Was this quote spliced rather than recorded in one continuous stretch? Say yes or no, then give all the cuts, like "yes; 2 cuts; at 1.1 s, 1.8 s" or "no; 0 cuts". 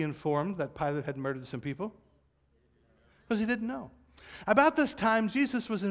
no; 0 cuts